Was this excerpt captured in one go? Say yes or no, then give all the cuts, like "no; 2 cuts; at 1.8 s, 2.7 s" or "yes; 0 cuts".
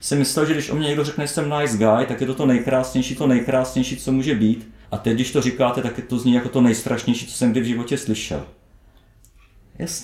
no; 2 cuts; at 3.2 s, 4.8 s